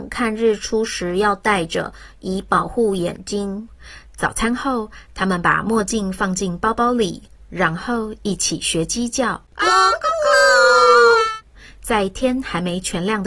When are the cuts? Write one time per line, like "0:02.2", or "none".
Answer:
0:09.5

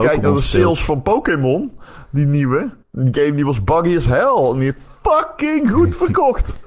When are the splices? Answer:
0:02.8

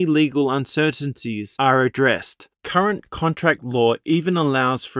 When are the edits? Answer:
0:02.5

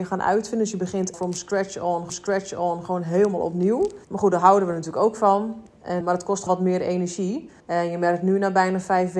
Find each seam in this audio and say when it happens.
0:01.1
0:02.1
0:04.0
0:06.0
0:06.5
0:07.6

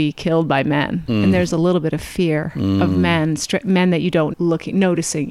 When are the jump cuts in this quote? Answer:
0:01.5
0:04.3

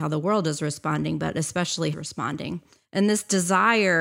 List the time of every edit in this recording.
0:01.9

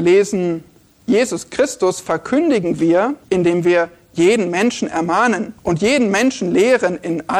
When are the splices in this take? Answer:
0:03.2
0:05.6

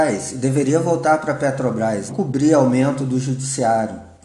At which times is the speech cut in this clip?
0:02.1

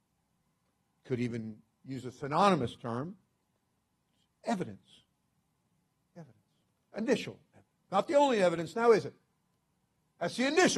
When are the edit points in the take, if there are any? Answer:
none

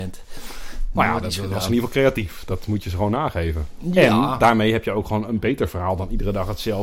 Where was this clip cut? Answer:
none

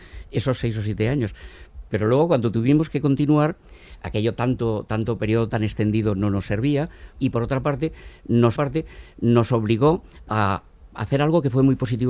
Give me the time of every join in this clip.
0:04.0
0:07.1
0:08.5

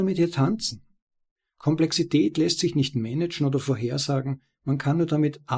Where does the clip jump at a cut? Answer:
none

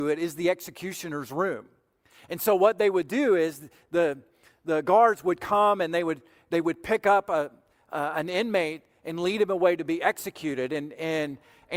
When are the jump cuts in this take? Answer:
none

